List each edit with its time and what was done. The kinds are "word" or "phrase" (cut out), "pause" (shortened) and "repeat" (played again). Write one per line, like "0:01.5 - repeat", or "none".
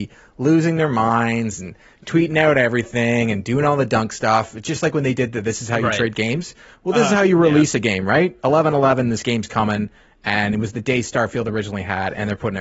none